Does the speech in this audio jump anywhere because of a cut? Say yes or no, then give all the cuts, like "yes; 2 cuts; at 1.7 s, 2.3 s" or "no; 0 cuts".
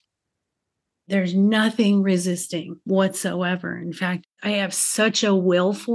yes; 1 cut; at 2.8 s